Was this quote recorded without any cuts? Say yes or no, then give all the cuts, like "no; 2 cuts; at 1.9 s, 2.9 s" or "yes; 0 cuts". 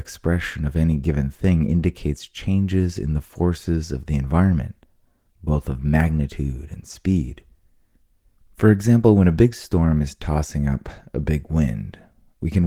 yes; 0 cuts